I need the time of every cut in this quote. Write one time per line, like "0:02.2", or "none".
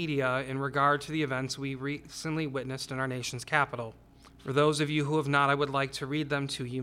0:04.3